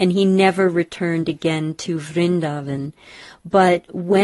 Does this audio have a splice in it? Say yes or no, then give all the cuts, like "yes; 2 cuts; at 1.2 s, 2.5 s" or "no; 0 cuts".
no; 0 cuts